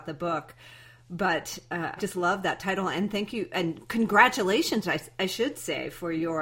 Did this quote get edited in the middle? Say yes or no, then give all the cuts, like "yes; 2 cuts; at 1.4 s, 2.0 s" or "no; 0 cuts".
yes; 1 cut; at 2.0 s